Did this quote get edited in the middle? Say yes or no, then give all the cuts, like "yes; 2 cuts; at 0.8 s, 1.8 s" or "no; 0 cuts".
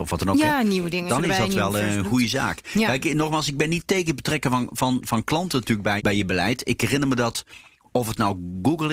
yes; 2 cuts; at 1.1 s, 6.0 s